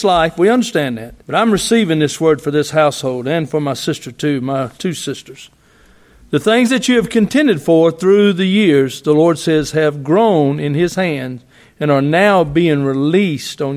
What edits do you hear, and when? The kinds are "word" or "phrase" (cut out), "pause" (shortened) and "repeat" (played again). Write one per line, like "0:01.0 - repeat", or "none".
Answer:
0:01.2 - pause
0:04.8 - pause